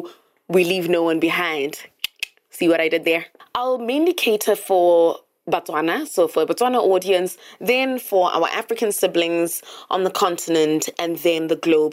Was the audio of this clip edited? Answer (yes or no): no